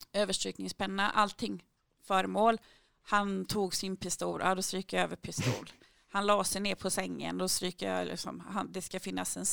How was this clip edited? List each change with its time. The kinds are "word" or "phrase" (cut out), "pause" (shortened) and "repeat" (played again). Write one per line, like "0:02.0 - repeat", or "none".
none

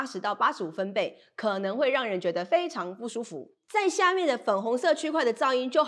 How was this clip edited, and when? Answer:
0:03.6 - pause

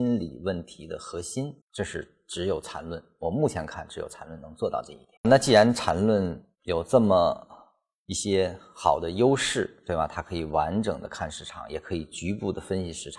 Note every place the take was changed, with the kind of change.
0:01.6 - pause
0:05.2 - pause

